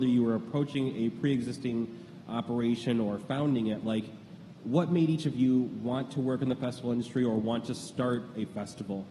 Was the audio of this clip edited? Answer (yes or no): no